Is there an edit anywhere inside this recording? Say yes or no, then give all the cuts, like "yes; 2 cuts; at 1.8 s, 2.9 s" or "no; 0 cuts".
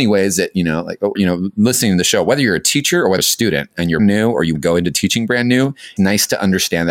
yes; 5 cuts; at 1.2 s, 3.2 s, 4.0 s, 4.6 s, 6.0 s